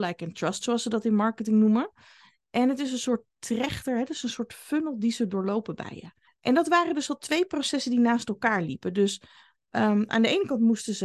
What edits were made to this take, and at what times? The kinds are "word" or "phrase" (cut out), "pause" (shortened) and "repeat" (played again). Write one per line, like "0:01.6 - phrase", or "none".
0:06.3 - pause